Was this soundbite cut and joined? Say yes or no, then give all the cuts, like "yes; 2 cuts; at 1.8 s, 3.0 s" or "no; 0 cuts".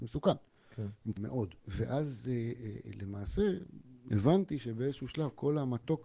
yes; 2 cuts; at 1.2 s, 1.6 s